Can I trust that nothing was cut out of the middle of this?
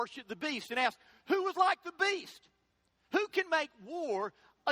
yes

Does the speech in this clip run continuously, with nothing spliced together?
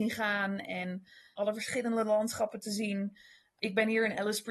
yes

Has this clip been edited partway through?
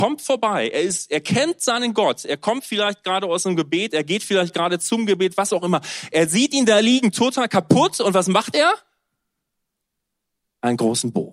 no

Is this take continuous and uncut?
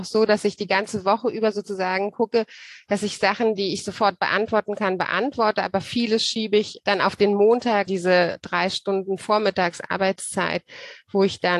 no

